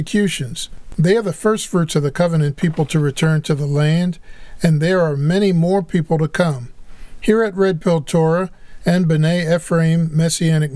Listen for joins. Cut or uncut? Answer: uncut